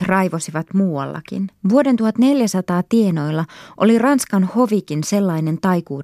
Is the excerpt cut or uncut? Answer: cut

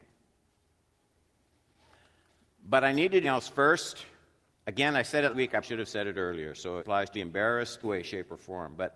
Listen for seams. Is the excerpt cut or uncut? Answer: cut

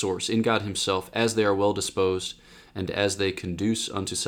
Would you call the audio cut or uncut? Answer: uncut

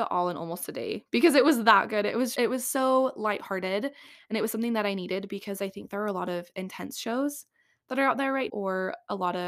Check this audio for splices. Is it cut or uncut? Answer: cut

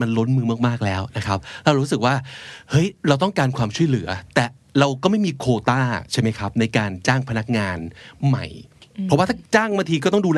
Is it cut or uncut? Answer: uncut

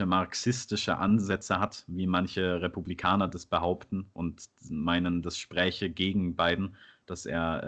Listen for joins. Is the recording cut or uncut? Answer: uncut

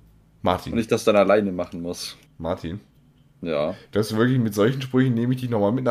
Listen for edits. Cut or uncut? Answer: uncut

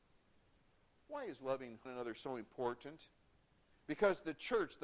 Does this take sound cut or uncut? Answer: cut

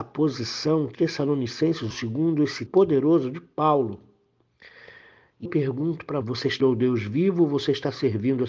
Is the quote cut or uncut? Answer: cut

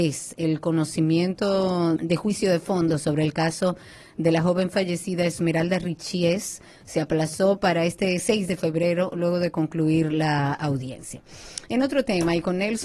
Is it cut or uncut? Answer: cut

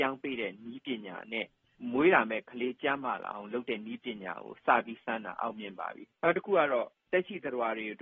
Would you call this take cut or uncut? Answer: cut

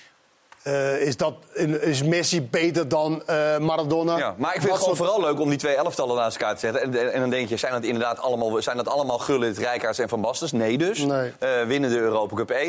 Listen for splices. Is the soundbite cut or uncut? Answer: uncut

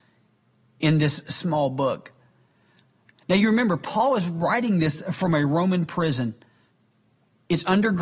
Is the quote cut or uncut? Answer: uncut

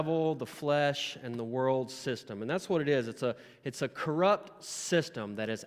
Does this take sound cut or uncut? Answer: uncut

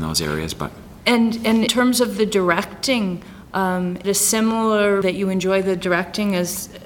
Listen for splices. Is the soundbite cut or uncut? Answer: cut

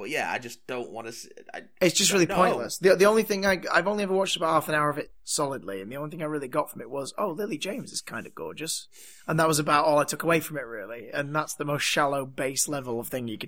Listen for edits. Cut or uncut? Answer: uncut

